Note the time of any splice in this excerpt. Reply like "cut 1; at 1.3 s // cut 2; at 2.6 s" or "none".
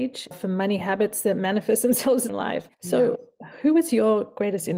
cut 1; at 2.3 s // cut 2; at 2.7 s